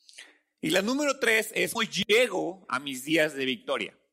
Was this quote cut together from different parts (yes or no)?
yes